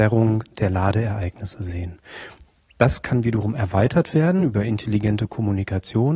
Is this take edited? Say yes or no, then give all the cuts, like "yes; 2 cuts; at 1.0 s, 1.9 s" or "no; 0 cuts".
no; 0 cuts